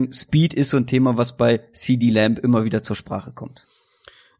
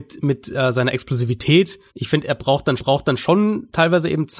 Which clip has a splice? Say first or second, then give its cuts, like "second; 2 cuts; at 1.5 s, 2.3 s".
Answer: second; 2 cuts; at 1.9 s, 2.8 s